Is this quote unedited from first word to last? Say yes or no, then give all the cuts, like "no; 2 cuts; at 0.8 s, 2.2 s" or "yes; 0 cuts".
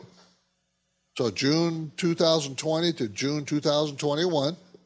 yes; 0 cuts